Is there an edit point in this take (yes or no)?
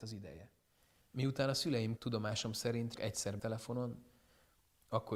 yes